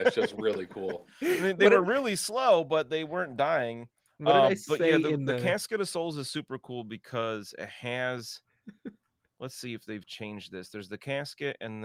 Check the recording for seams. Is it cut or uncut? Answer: cut